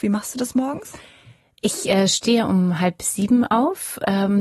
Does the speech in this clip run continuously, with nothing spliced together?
yes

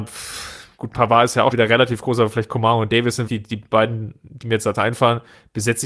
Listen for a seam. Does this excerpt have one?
yes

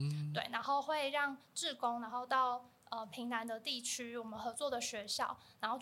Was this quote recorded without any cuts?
yes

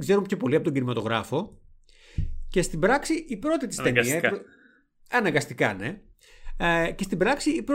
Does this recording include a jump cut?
no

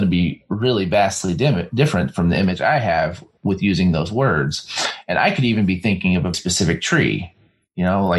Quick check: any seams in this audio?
yes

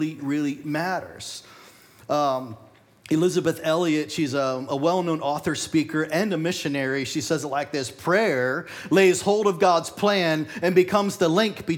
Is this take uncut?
yes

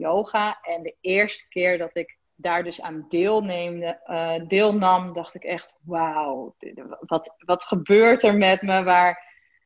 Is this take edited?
yes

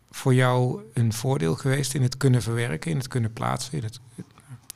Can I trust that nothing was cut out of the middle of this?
yes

